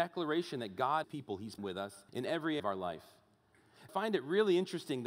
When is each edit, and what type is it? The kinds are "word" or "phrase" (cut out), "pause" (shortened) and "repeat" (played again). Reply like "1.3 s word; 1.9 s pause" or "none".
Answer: 1.0 s phrase; 1.6 s word; 2.1 s pause; 2.6 s word; 3.9 s phrase

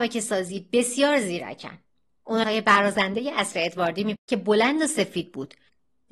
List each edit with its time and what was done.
2.4 s word; 4.2 s word

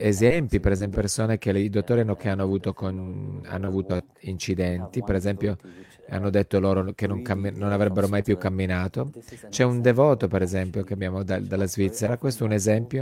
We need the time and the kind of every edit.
0.9 s word; 2.2 s word

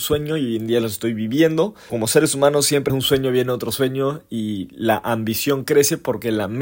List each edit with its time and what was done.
1.9 s word; 2.9 s word

